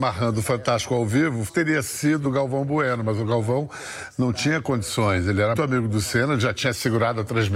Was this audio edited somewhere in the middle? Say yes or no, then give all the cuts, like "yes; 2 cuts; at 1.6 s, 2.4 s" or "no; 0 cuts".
yes; 3 cuts; at 1.5 s, 2.2 s, 5.5 s